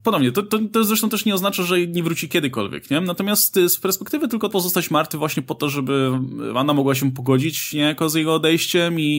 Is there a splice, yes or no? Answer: yes